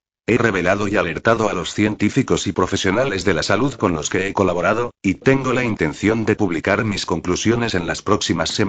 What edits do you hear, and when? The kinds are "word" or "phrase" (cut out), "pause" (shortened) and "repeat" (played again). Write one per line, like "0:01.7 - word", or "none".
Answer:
none